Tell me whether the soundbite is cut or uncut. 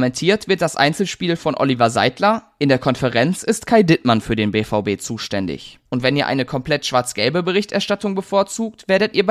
cut